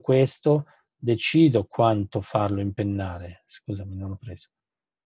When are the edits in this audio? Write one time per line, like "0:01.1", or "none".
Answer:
none